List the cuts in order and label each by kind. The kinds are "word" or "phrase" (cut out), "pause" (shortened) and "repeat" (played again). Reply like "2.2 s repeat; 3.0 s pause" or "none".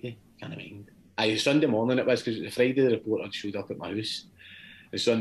none